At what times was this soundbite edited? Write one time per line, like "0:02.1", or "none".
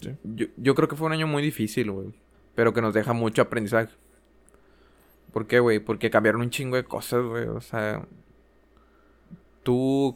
0:02.3